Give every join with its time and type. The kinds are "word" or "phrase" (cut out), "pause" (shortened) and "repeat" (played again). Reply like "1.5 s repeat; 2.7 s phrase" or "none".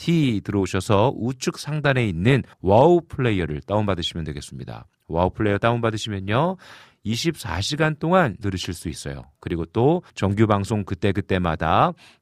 2.5 s pause; 8.4 s word; 10.1 s pause